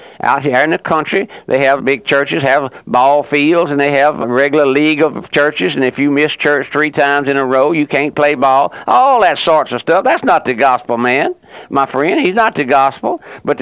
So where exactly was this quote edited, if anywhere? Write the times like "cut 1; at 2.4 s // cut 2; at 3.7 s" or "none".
cut 1; at 1.8 s // cut 2; at 4.2 s